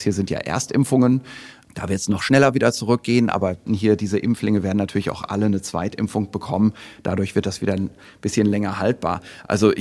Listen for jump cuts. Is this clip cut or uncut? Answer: cut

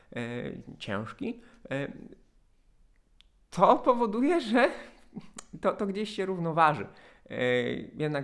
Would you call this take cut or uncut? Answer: uncut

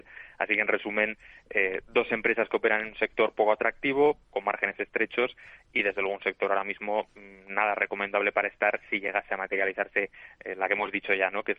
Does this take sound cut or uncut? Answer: uncut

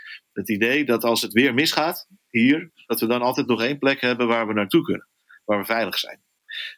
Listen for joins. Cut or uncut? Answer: uncut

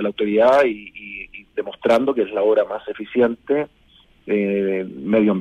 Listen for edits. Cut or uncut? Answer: uncut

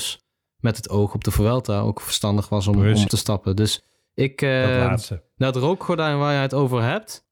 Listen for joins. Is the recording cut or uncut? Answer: cut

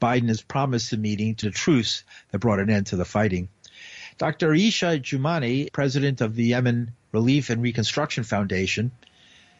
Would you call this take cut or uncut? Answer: cut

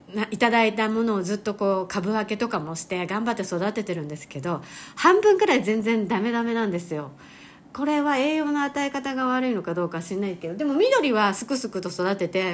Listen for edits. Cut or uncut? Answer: uncut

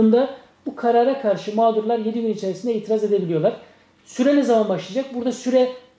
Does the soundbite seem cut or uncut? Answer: uncut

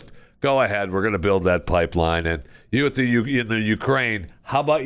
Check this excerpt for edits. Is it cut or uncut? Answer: uncut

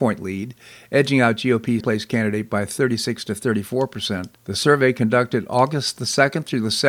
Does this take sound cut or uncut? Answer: cut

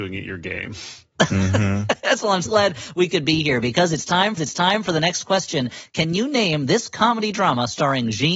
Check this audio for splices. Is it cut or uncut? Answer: cut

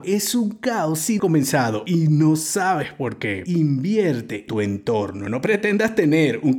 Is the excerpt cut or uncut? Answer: cut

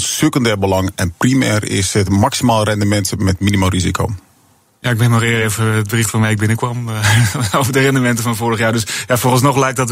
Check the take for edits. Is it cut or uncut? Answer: uncut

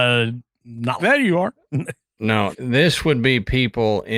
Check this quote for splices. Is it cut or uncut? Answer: cut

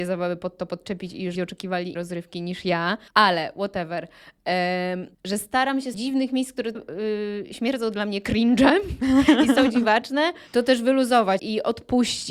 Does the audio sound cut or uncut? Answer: cut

